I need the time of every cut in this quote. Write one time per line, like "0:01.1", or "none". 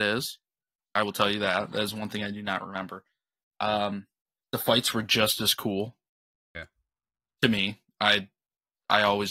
none